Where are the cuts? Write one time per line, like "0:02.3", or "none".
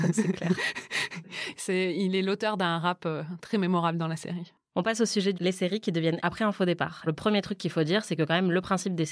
0:05.4
0:06.2
0:07.1